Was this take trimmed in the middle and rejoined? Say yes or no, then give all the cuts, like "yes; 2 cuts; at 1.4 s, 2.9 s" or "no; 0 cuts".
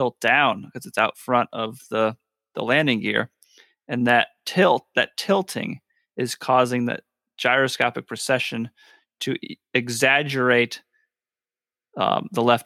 no; 0 cuts